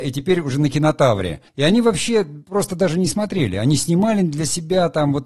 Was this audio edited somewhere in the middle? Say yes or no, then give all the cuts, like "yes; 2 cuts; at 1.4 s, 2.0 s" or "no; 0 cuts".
yes; 1 cut; at 1.5 s